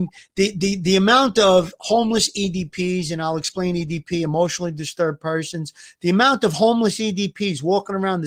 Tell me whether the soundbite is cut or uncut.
uncut